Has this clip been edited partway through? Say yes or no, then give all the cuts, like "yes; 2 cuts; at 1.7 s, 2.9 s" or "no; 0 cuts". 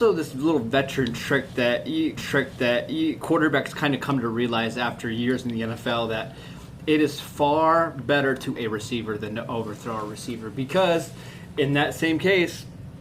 yes; 2 cuts; at 2.2 s, 8.6 s